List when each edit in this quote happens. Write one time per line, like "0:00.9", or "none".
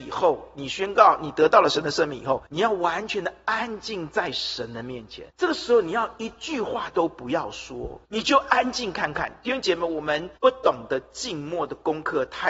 0:02.5
0:05.3
0:08.0
0:10.4